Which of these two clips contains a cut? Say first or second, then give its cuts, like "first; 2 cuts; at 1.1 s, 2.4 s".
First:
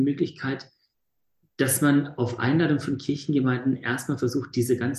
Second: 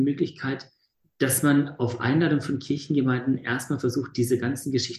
second; 1 cut; at 1.0 s